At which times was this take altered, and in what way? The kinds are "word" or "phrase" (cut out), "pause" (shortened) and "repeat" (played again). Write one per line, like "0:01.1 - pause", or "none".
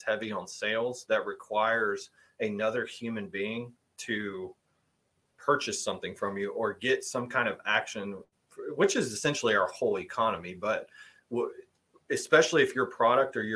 none